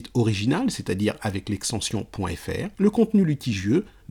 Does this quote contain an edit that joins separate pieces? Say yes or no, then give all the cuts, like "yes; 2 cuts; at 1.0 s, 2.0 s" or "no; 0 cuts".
yes; 1 cut; at 2.7 s